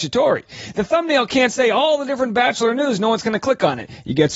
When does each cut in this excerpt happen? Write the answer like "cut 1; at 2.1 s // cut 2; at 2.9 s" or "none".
none